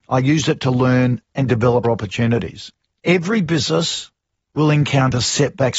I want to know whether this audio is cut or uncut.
cut